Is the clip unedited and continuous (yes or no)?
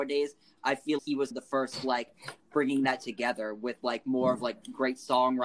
no